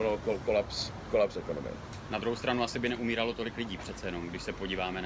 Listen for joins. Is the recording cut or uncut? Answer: uncut